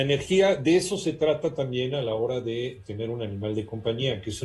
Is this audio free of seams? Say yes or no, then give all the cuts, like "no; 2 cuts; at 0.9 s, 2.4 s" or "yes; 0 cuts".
yes; 0 cuts